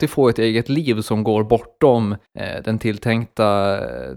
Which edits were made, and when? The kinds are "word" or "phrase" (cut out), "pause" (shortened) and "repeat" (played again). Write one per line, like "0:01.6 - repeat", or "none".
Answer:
0:02.3 - pause